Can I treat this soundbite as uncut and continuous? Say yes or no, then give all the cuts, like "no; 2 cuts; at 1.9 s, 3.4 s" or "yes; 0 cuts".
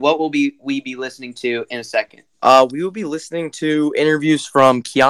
no; 1 cut; at 2.3 s